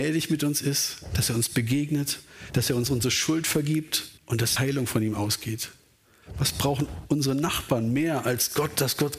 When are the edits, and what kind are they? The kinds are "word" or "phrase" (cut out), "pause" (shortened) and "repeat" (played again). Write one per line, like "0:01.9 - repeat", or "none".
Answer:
0:04.2 - pause
0:04.6 - word